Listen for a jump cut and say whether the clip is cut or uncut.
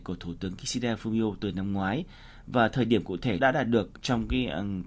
uncut